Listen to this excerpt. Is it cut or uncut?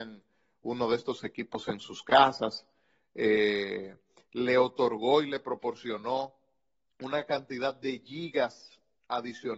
uncut